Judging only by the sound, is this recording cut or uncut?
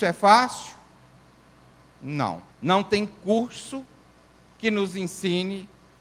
cut